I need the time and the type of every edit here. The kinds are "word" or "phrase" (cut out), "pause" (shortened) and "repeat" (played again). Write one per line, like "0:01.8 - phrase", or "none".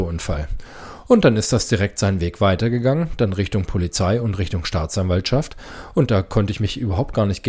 none